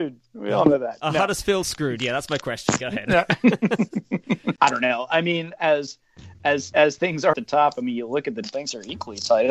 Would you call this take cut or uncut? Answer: cut